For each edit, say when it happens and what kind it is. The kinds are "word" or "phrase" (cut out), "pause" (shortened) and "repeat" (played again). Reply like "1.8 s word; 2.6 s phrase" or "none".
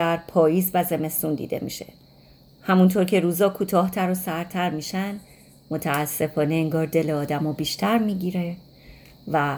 none